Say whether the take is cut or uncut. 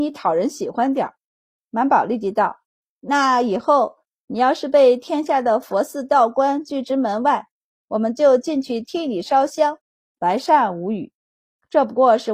cut